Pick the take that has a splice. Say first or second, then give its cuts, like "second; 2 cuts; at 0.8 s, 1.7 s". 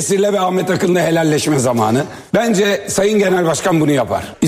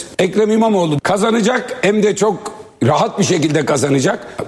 first; 1 cut; at 2.3 s